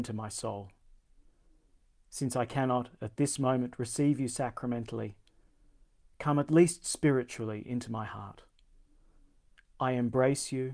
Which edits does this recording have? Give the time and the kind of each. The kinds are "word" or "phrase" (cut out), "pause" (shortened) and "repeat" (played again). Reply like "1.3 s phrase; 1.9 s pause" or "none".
none